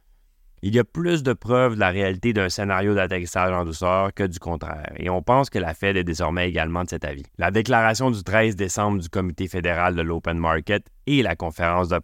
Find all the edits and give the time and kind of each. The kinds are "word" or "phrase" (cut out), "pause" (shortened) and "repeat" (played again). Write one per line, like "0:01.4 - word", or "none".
0:07.3 - pause